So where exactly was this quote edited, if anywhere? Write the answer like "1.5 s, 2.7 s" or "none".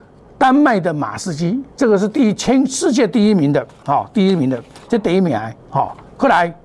5.6 s